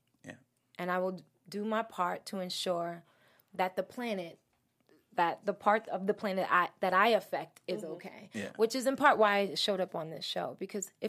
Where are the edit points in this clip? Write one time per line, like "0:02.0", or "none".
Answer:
none